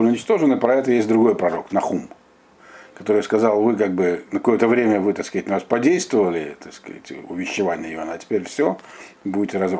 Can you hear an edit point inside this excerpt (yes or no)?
no